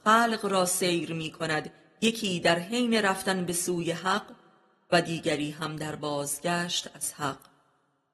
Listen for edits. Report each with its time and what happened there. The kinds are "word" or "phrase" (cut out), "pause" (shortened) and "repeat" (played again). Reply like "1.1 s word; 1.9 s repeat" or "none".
none